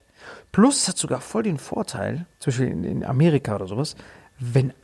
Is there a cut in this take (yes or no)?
yes